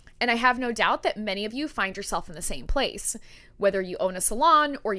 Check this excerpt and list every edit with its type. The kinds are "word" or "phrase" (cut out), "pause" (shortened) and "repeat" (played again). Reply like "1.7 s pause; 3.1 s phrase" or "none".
none

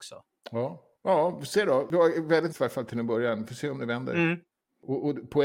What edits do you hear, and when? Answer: 1.0 s pause; 2.5 s word

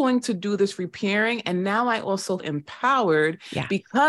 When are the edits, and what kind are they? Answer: 2.4 s word

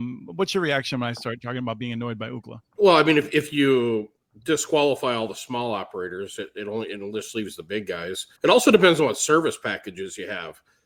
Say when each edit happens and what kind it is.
2.7 s pause; 8.3 s pause

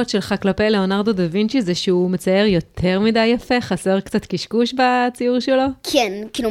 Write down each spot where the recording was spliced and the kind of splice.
none

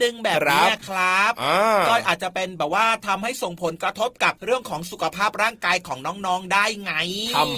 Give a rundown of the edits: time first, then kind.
4.4 s pause

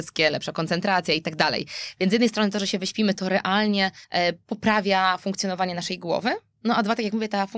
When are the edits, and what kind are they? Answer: 4.0 s pause

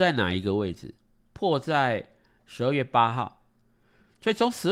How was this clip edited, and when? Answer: none

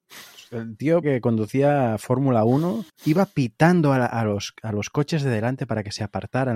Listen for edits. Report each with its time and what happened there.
1.0 s word; 2.9 s pause

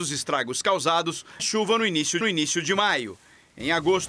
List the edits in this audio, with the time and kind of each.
1.4 s word; 2.2 s repeat

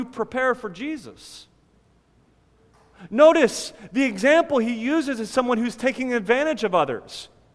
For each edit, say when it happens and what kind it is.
none

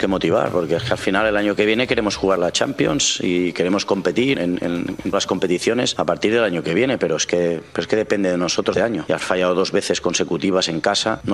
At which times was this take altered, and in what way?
2.4 s word; 4.3 s word; 5.1 s word; 8.7 s word; 9.2 s phrase

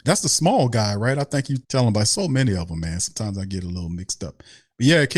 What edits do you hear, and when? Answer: 1.6 s pause

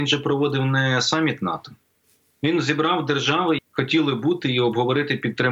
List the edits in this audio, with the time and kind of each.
2.4 s word; 3.6 s word

